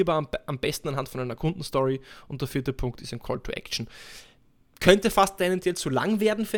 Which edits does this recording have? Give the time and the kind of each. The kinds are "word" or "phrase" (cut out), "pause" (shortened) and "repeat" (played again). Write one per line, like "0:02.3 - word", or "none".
none

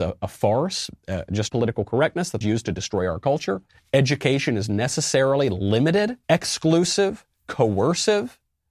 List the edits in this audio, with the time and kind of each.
0:01.5 - phrase
0:02.4 - phrase
0:03.7 - pause
0:06.2 - pause

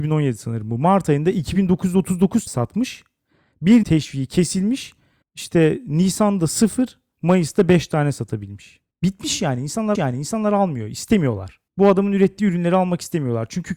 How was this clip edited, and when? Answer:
0:02.5 - word
0:03.8 - phrase
0:05.2 - pause
0:08.9 - pause
0:09.9 - repeat
0:11.7 - pause

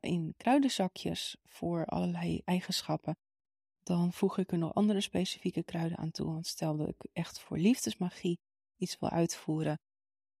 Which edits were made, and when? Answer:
none

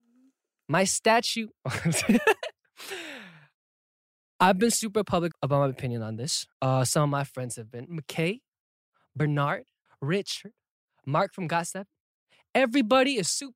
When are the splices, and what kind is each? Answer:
0:05.3 - word
0:06.5 - pause
0:09.9 - pause

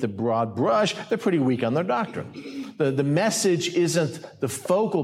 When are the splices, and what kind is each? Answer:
none

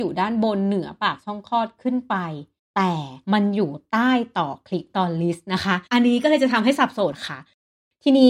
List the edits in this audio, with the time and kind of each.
0:02.6 - pause
0:03.2 - pause
0:05.9 - pause

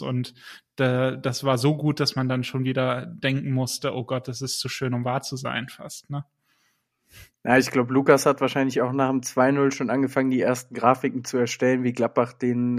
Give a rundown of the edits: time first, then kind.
none

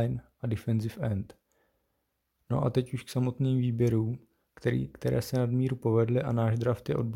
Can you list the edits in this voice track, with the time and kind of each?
none

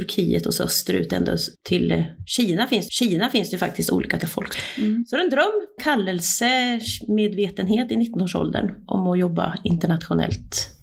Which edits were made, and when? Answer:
0:01.5 - pause
0:02.9 - repeat
0:04.2 - word
0:05.8 - word

